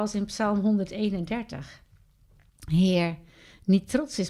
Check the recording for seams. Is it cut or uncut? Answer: uncut